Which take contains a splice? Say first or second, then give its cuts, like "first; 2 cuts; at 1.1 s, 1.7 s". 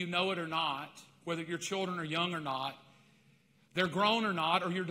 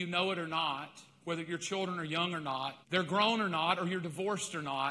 second; 1 cut; at 2.8 s